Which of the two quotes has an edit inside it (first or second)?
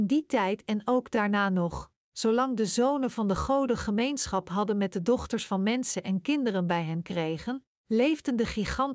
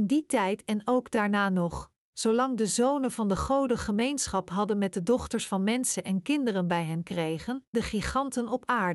second